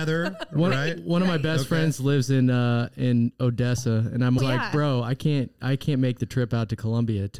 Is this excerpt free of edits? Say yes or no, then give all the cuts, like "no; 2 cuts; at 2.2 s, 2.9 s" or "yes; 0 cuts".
no; 1 cut; at 4.4 s